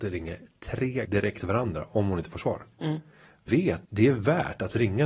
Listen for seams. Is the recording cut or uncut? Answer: cut